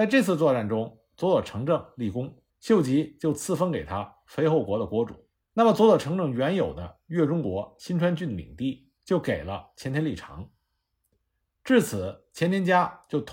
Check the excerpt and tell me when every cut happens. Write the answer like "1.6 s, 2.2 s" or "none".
2.5 s, 5.3 s, 9.0 s